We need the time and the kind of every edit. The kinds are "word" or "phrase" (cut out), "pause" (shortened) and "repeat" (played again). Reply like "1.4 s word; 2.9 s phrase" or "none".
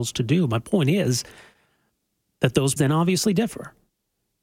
2.8 s word